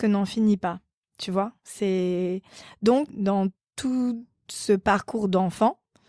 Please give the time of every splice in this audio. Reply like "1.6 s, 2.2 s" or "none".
3.1 s, 3.6 s